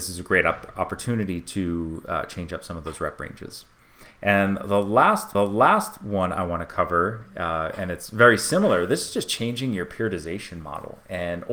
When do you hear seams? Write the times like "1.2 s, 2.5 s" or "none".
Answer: 5.3 s